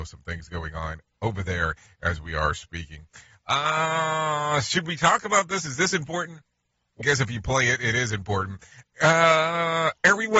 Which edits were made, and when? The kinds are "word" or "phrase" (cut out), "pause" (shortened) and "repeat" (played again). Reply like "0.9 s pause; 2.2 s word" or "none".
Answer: 7.0 s word